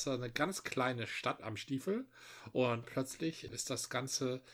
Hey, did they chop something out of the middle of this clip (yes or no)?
yes